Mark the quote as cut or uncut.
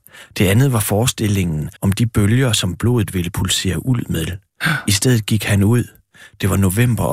cut